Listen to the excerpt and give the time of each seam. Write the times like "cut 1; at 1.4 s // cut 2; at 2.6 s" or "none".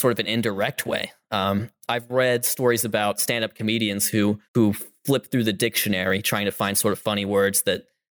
cut 1; at 4.4 s